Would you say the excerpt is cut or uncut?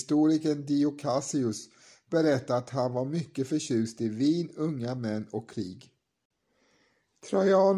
uncut